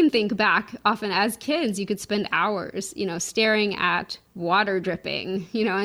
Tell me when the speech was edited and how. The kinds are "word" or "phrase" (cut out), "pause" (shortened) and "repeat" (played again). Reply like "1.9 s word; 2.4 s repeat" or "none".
4.2 s pause